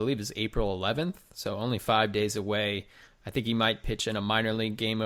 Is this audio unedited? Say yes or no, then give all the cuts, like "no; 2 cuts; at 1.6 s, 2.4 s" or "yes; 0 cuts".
yes; 0 cuts